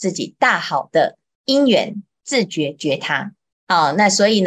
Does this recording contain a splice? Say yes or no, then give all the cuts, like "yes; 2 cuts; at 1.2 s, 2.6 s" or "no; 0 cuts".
yes; 1 cut; at 3.5 s